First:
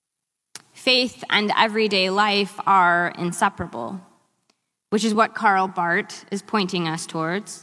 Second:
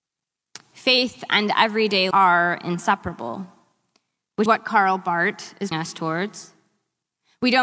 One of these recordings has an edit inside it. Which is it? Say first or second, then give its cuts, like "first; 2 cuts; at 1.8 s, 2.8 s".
second; 3 cuts; at 2.1 s, 4.5 s, 5.7 s